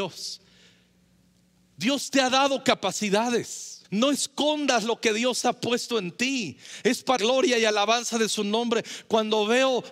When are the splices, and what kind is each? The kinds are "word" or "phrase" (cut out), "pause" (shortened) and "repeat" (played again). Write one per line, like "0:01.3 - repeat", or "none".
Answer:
0:03.8 - pause
0:07.2 - word